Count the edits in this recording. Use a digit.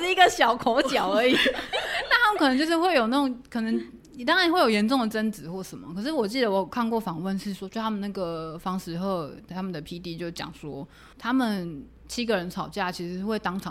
1